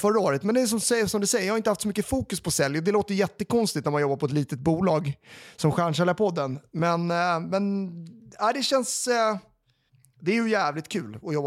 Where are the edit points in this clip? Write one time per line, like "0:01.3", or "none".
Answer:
0:09.9